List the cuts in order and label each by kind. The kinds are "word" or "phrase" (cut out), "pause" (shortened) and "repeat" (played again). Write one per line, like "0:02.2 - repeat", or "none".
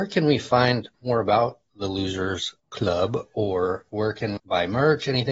0:00.9 - pause
0:02.6 - pause
0:04.4 - word